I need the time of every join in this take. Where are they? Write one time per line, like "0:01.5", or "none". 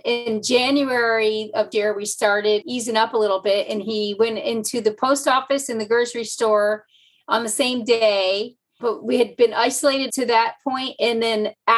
0:01.7
0:02.6
0:08.8
0:10.1